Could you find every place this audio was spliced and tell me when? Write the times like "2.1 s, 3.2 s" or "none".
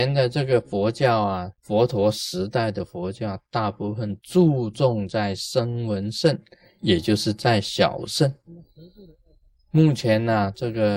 1.6 s